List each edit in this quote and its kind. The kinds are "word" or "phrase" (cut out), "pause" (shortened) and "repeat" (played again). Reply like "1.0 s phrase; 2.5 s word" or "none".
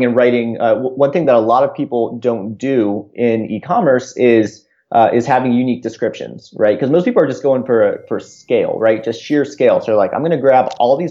none